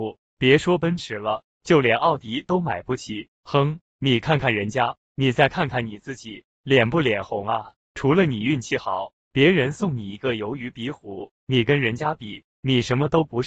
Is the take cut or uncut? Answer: cut